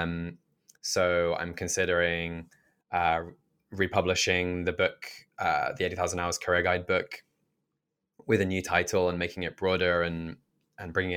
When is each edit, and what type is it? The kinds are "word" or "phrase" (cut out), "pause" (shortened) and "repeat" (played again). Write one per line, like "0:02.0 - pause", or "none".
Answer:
none